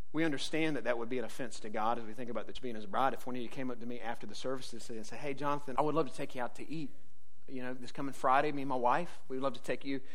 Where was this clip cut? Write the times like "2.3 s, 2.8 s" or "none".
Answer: 2.5 s, 5.7 s